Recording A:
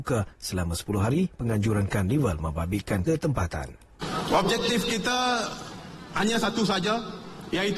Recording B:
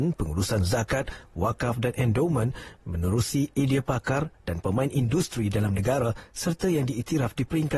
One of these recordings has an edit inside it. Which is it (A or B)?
A